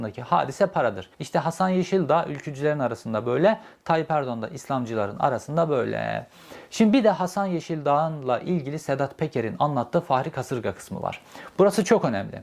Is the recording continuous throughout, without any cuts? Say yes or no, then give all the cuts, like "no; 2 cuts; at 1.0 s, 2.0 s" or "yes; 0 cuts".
no; 1 cut; at 1.1 s